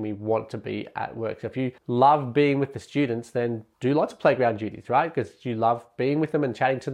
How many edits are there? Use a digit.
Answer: 2